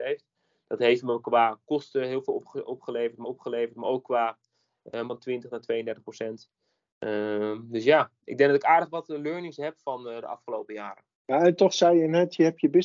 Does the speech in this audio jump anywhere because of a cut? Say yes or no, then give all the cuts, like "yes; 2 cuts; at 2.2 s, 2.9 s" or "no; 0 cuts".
yes; 3 cuts; at 3.2 s, 5.1 s, 11.1 s